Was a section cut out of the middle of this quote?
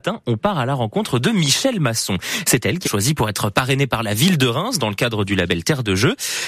yes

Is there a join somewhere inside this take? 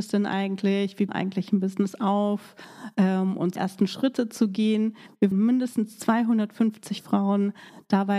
yes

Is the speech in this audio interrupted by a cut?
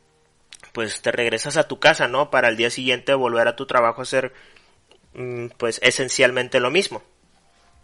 no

